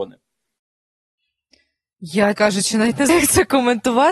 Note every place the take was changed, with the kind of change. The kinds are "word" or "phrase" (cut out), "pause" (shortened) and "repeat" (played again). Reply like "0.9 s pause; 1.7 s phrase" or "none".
2.3 s word; 3.1 s word